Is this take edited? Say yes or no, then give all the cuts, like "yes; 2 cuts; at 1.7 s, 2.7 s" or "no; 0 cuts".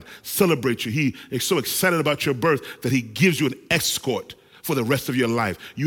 no; 0 cuts